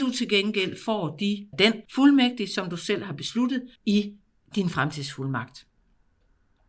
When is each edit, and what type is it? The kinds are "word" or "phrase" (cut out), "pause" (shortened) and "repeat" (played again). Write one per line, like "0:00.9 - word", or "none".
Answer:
0:01.5 - word
0:01.8 - pause
0:03.7 - pause